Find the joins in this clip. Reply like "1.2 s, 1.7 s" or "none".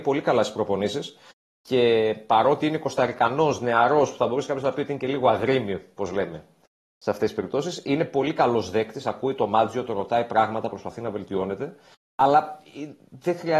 none